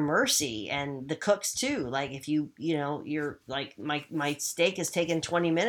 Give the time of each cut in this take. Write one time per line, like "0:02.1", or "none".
none